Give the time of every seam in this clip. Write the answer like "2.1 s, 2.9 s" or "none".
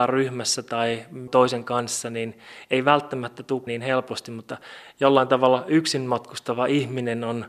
1.3 s, 3.7 s